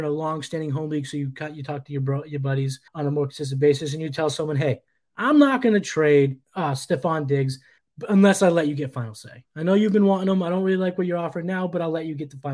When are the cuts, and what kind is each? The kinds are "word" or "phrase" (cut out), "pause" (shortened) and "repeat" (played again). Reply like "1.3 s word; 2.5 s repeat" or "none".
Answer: 2.9 s pause; 6.4 s pause